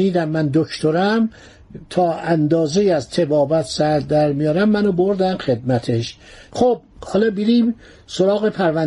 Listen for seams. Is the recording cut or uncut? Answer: uncut